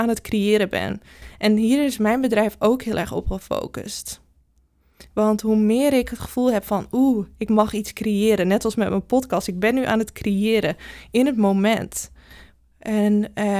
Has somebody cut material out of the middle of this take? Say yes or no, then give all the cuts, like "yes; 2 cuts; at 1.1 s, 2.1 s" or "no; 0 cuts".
no; 0 cuts